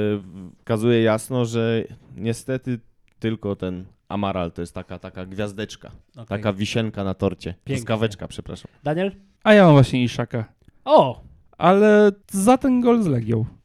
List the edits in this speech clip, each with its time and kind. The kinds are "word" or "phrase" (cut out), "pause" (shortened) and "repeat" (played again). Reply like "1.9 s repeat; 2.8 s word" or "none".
none